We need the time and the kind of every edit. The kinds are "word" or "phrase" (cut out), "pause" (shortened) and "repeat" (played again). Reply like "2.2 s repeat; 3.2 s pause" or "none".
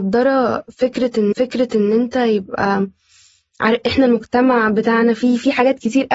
1.3 s repeat